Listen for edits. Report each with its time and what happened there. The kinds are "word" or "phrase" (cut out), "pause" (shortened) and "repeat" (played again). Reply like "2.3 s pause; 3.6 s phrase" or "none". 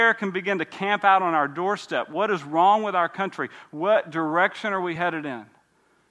none